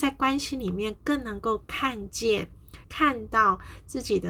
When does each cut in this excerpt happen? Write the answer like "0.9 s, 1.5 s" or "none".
2.8 s